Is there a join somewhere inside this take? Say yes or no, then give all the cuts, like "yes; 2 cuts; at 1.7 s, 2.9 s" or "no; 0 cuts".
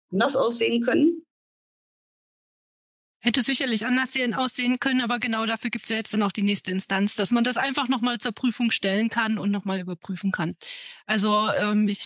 no; 0 cuts